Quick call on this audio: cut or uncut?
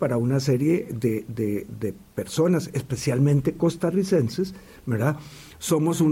uncut